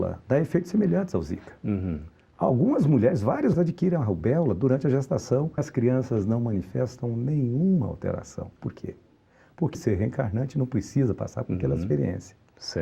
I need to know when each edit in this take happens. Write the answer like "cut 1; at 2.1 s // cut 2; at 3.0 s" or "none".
cut 1; at 3.5 s // cut 2; at 5.6 s // cut 3; at 9.7 s